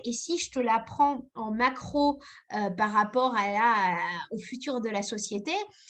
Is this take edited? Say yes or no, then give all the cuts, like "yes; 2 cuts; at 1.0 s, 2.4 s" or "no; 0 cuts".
no; 0 cuts